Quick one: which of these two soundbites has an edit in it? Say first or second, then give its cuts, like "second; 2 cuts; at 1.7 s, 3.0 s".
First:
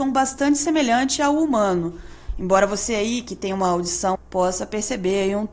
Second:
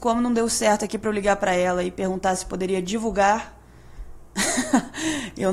first; 1 cut; at 4.1 s